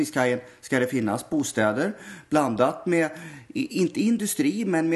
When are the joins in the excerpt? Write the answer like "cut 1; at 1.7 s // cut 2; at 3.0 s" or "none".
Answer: none